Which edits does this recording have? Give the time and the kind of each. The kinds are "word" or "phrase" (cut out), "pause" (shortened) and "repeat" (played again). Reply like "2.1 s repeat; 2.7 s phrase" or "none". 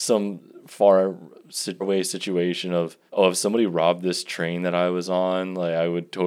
1.8 s word; 3.1 s pause

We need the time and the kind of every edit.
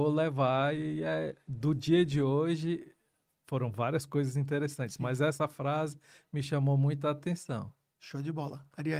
none

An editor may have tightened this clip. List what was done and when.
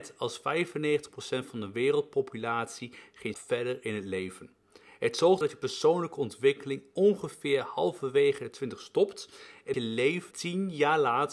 3.3 s word; 5.4 s word; 9.7 s word; 10.3 s word

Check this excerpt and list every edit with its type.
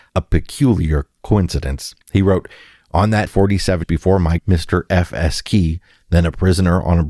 2.0 s pause; 3.3 s word; 3.8 s word; 4.4 s word

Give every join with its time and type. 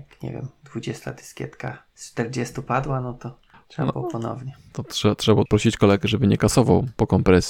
1.9 s pause; 5.5 s word

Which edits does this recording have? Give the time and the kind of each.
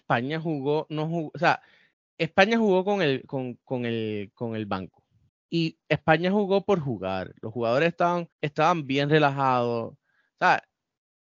1.9 s pause; 5.3 s pause; 8.3 s pause

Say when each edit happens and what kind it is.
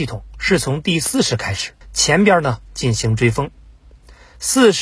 1.8 s pause

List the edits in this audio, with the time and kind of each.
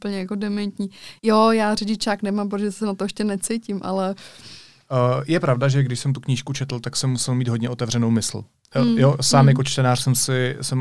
1.2 s pause

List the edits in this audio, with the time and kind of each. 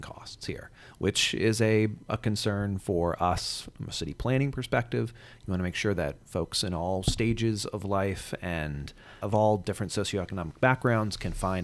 9.2 s word

